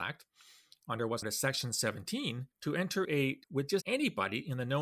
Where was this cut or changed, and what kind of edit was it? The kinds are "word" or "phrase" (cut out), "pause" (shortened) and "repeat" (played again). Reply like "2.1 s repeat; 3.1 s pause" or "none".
1.2 s word; 2.5 s pause; 3.0 s word; 3.4 s phrase; 3.8 s word